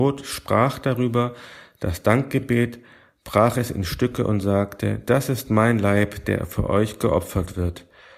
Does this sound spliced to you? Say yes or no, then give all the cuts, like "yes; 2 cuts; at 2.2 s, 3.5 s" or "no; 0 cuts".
no; 0 cuts